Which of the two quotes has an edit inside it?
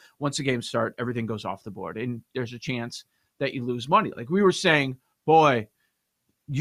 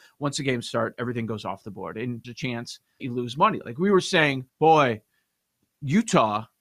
second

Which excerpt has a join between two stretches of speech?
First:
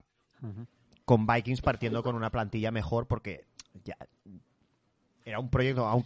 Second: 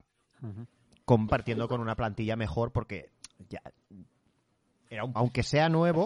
second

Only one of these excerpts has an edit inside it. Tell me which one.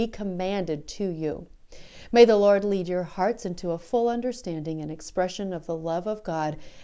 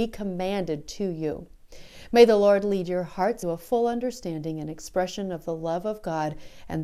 second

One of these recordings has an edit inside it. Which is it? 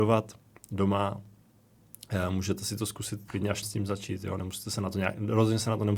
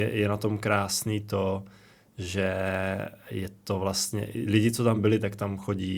first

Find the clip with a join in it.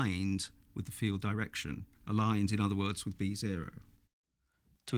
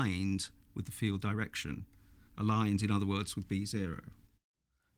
first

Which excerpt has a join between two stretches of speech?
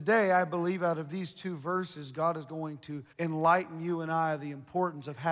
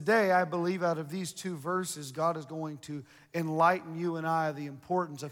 first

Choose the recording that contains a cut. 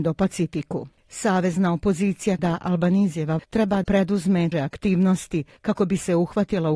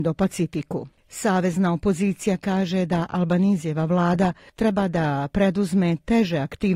first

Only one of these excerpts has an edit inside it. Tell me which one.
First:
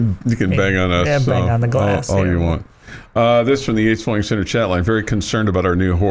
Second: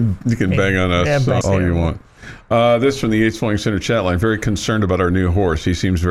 second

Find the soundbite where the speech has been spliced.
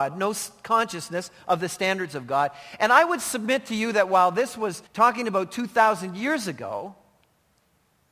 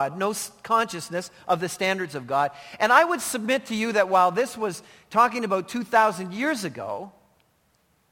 first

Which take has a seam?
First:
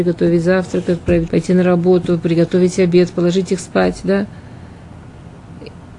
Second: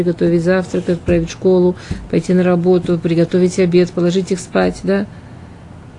first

